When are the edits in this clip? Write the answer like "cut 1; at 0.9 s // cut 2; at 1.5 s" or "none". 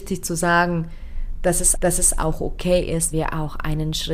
cut 1; at 1.7 s // cut 2; at 3.1 s